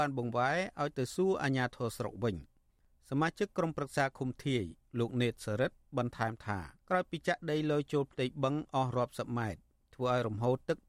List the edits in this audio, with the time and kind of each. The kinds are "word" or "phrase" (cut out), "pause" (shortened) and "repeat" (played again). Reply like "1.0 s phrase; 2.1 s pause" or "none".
6.8 s pause